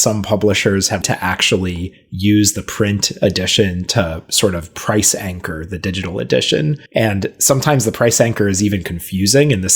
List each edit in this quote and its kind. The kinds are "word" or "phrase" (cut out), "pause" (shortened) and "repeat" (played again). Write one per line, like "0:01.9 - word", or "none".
0:01.0 - word
0:06.9 - pause